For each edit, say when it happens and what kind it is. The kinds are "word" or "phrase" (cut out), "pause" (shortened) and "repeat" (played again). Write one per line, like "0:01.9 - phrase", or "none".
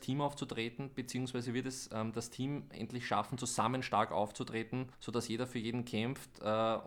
0:04.9 - pause

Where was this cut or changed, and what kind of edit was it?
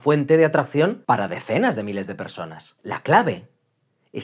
none

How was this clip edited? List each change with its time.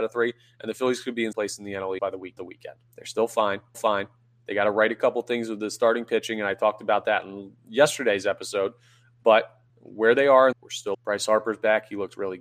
0:01.3 - word
0:02.0 - word
0:02.4 - phrase
0:02.9 - pause
0:03.7 - repeat
0:09.7 - pause
0:10.5 - phrase
0:10.9 - word

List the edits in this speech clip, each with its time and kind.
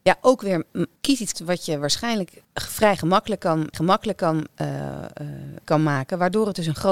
0:01.0 - pause
0:01.3 - phrase
0:02.4 - pause
0:03.7 - repeat
0:05.6 - word

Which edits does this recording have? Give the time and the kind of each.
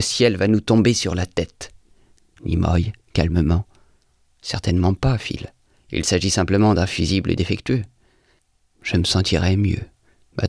none

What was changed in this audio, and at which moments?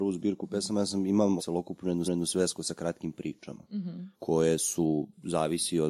0:01.4 - word
0:02.0 - repeat
0:04.1 - pause

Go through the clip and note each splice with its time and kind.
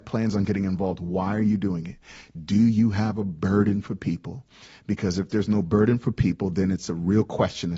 none

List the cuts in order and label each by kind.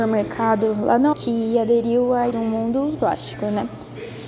0:01.1 - word
0:02.3 - word
0:02.9 - word

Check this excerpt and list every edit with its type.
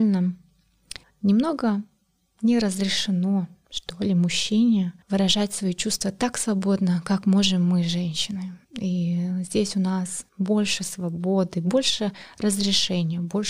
0:01.0 - pause
0:05.0 - pause
0:08.6 - pause
0:10.3 - pause

